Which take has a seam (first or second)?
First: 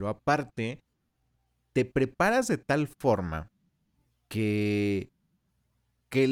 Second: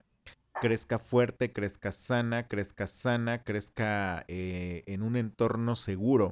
second